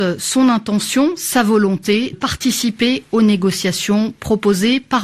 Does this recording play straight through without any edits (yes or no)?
no